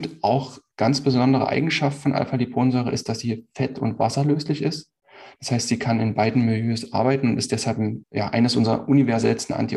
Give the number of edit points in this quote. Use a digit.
1